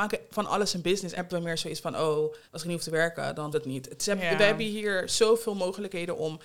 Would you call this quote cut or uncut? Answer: cut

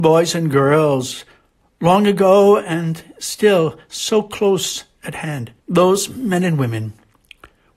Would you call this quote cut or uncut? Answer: cut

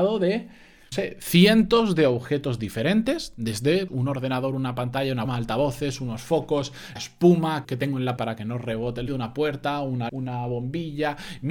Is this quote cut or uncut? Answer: cut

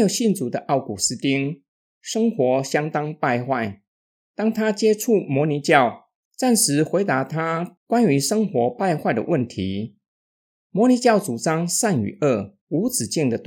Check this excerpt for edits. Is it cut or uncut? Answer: uncut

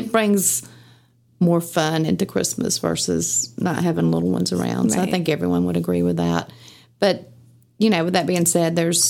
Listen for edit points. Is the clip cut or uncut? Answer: uncut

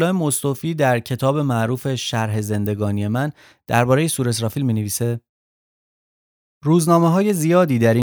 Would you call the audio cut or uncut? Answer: uncut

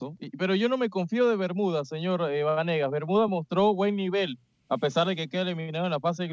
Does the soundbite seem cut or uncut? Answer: uncut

